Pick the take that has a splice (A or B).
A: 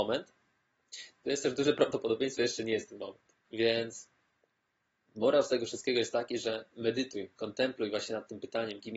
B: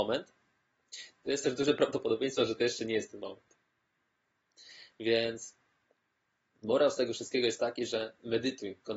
A